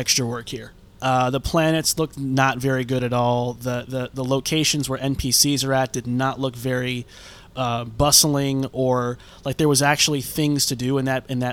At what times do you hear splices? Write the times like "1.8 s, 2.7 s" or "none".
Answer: none